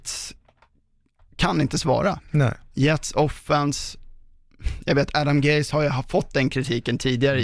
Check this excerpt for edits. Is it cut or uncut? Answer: uncut